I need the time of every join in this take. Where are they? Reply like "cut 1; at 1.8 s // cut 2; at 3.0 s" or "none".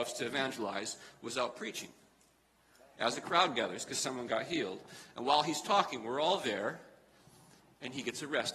none